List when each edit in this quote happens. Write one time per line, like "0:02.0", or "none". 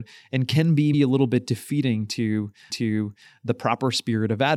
0:00.9
0:02.7